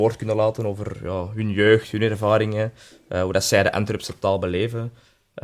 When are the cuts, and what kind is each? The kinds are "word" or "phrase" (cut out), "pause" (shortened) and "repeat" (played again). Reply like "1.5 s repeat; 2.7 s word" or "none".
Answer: none